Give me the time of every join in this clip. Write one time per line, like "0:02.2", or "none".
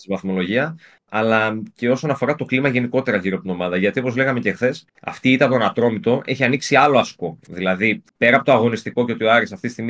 0:04.9
0:08.1